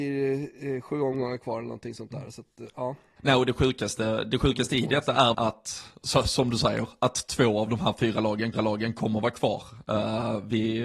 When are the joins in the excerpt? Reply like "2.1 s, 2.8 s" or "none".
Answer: 3.2 s, 5.3 s, 8.5 s